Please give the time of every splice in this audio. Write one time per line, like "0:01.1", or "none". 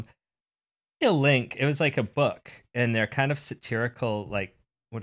0:01.0

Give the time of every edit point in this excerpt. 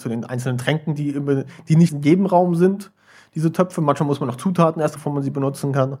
0:01.9
0:05.0

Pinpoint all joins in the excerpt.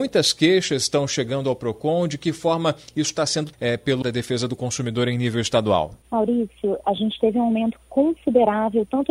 0:03.5
0:04.0
0:06.8

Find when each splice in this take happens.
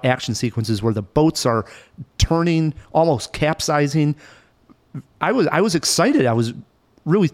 none

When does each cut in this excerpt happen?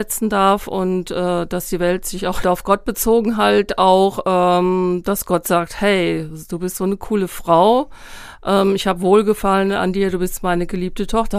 0:02.4

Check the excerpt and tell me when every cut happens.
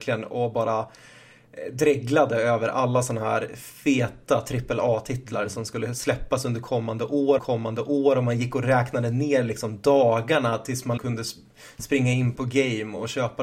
0:07.4
0:11.0
0:12.4

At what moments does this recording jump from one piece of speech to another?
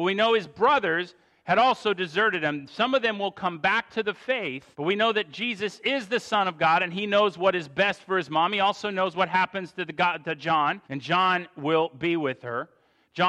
0:04.7
0:10.8

